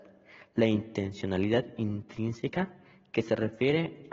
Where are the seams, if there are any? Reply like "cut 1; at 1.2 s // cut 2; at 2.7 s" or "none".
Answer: none